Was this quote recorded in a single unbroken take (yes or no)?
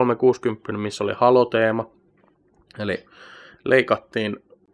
yes